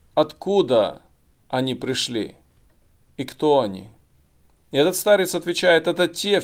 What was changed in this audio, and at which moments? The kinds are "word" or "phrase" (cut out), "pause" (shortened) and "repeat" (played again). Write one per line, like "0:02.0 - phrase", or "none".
none